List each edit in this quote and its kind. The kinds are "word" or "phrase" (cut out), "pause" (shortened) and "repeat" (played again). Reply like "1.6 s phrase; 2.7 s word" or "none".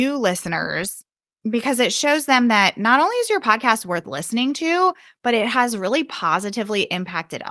none